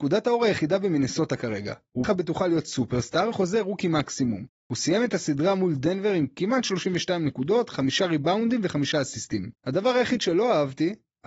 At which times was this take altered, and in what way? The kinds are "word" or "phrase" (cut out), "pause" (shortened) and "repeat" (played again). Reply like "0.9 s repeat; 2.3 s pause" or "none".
2.0 s word; 3.3 s word; 4.6 s pause; 9.6 s pause